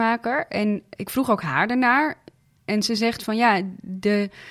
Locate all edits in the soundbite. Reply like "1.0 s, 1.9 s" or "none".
1.0 s